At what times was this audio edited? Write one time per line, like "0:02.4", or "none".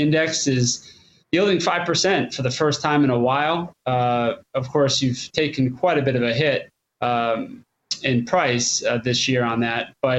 none

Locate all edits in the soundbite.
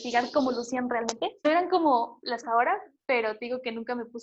0:02.4

